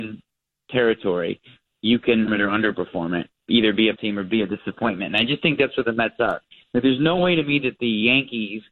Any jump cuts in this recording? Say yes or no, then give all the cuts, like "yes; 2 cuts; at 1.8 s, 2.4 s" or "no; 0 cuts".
yes; 3 cuts; at 2.3 s, 3.3 s, 4.0 s